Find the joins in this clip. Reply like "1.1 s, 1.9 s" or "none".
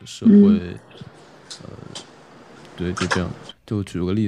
none